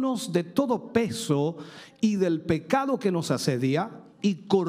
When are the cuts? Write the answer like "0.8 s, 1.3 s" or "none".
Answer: none